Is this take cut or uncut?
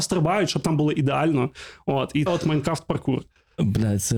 cut